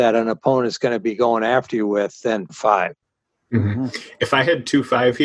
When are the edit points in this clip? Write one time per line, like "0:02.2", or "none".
0:02.5